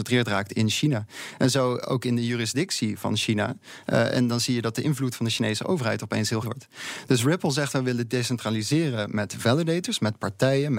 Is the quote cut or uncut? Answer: cut